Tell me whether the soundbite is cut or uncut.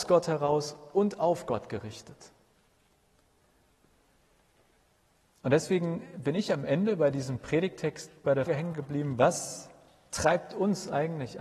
cut